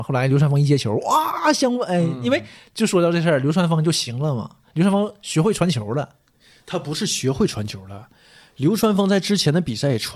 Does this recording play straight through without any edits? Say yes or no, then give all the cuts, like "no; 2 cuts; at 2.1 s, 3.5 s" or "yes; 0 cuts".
yes; 0 cuts